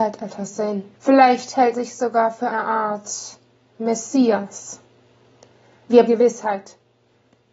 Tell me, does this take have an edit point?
yes; 4 cuts; at 0.9 s, 1.7 s, 2.5 s, 6.1 s

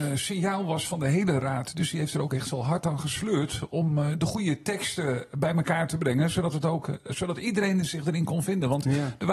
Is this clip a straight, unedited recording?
yes; 0 cuts

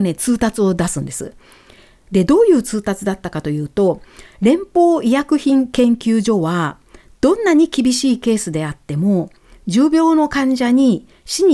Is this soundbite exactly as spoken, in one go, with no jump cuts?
yes; 0 cuts

